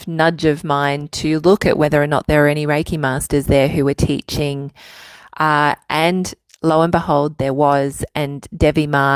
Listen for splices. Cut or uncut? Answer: uncut